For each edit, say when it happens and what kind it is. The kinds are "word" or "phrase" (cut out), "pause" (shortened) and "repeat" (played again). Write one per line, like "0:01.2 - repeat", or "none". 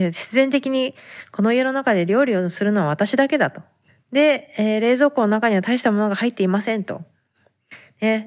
none